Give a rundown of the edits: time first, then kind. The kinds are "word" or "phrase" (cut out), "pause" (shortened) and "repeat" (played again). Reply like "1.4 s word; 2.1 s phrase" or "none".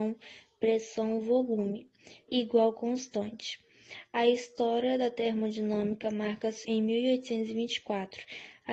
2.3 s word; 6.6 s word

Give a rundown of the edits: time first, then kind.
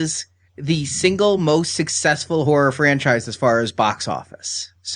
none

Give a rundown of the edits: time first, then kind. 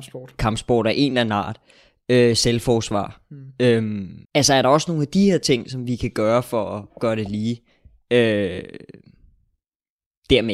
4.2 s pause

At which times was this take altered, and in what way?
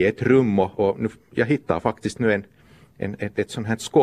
none

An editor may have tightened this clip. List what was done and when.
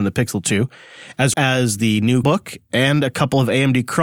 1.3 s word; 2.2 s word

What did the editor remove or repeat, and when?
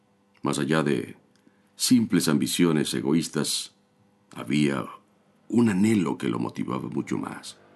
none

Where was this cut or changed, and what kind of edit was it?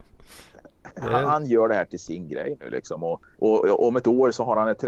3.3 s pause

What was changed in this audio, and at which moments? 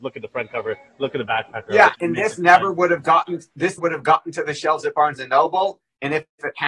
1.9 s word; 3.8 s word

